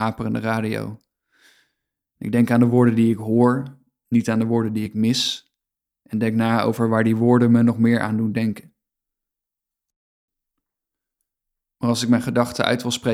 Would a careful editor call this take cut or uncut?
uncut